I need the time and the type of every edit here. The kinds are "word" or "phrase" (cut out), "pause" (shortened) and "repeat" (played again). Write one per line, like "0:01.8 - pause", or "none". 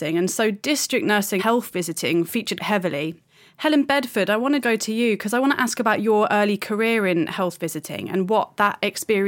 0:01.4 - word
0:02.6 - word
0:04.6 - word